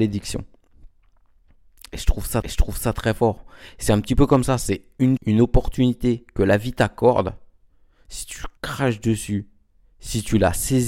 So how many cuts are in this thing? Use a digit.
3